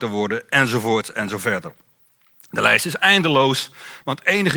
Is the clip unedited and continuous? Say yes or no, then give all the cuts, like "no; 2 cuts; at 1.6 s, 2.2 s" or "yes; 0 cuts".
yes; 0 cuts